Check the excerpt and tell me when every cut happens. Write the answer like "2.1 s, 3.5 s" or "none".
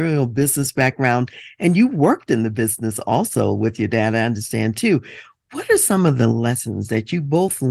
none